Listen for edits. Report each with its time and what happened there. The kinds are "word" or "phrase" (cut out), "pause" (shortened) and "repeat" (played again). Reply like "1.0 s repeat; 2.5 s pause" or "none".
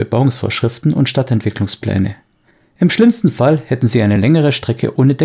none